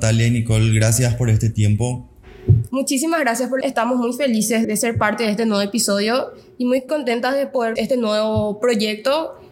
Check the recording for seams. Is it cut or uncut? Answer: cut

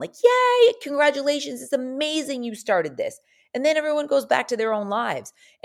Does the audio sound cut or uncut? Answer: uncut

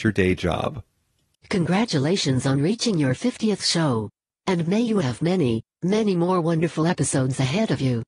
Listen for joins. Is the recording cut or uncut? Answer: uncut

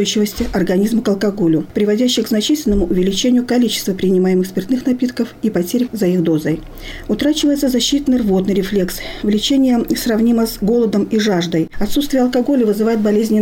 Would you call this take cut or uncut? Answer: cut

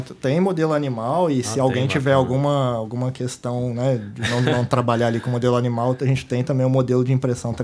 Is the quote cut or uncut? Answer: uncut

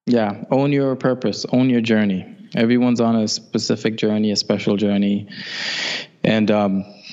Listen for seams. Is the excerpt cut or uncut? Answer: uncut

